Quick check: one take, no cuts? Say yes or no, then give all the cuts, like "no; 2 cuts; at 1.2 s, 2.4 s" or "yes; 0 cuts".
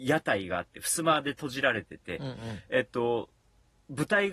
yes; 0 cuts